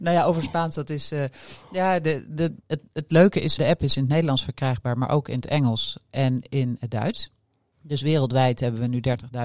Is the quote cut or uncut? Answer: cut